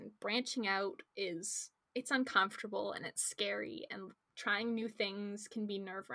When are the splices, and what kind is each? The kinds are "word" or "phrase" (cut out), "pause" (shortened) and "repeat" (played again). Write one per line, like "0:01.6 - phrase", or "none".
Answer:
none